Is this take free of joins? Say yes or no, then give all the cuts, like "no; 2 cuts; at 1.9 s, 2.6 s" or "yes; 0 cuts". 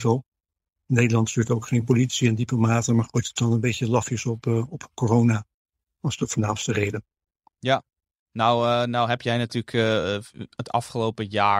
yes; 0 cuts